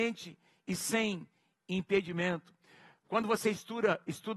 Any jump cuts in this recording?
no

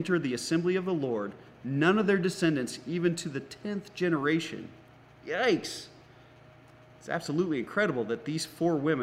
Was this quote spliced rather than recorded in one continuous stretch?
no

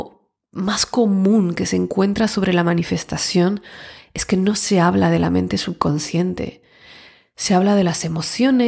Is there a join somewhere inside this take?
no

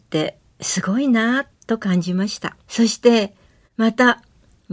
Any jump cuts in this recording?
yes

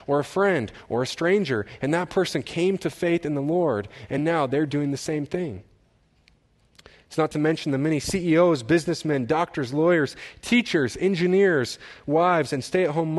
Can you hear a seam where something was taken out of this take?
no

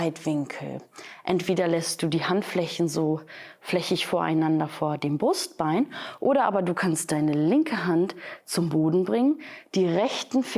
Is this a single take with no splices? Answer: yes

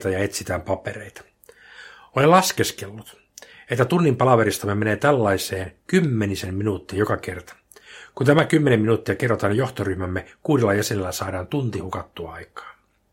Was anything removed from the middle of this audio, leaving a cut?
no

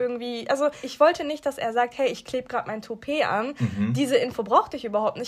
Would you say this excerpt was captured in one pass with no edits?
yes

